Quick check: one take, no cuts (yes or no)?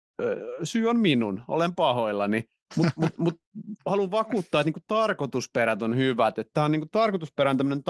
yes